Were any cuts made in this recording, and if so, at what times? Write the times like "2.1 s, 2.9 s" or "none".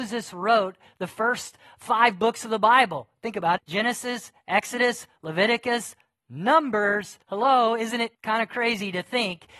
3.6 s, 7.2 s, 8.1 s